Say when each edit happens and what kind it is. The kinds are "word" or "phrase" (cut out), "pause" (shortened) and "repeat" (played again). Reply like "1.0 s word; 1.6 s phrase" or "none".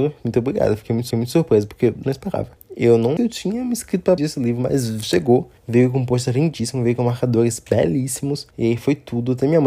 1.1 s repeat; 2.0 s word; 2.6 s pause; 3.2 s phrase; 4.2 s word; 5.6 s pause; 8.5 s pause